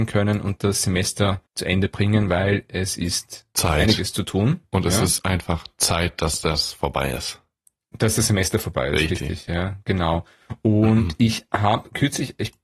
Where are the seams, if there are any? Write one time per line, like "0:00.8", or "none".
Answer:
0:01.5